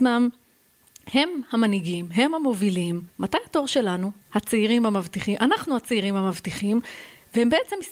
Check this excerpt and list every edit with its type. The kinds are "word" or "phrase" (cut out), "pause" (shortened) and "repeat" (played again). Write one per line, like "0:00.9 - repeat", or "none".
0:03.1 - pause
0:04.2 - pause